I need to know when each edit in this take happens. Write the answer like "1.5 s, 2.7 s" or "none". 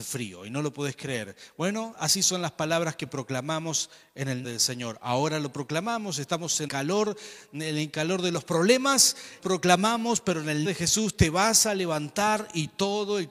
4.4 s, 6.7 s, 9.4 s, 10.7 s

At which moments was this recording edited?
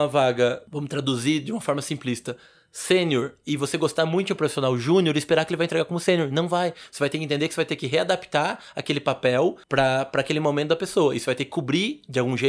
none

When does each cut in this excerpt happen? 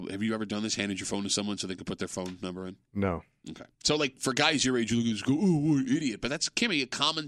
2.8 s, 3.7 s

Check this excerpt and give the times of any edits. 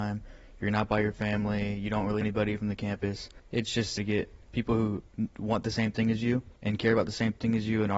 2.2 s, 3.4 s, 4.0 s, 4.5 s, 5.1 s, 6.6 s

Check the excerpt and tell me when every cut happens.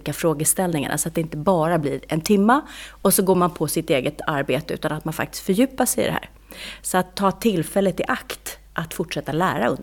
none

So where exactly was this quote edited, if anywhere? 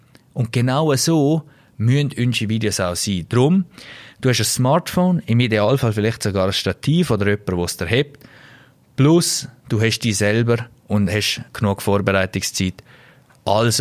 11.5 s

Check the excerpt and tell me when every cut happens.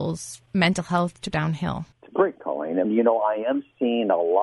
1.3 s, 1.9 s, 2.4 s, 2.8 s

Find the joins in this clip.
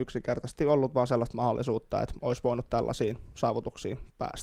none

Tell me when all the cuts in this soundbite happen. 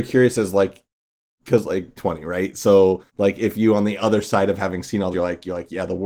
2.0 s, 3.1 s, 5.1 s

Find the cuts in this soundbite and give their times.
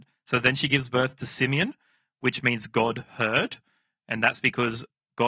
none

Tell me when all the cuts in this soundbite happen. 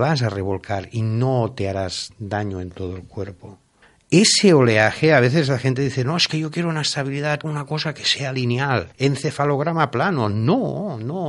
3.8 s, 7.4 s, 8.9 s

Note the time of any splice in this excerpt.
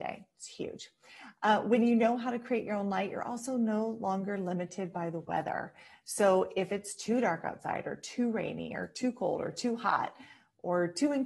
none

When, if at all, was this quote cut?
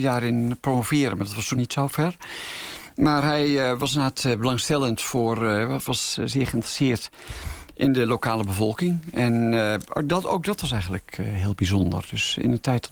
1.5 s, 5.9 s

